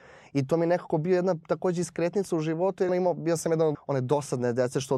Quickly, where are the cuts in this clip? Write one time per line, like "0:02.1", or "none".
0:02.9
0:03.7